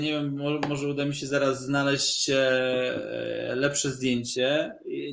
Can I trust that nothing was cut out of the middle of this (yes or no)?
yes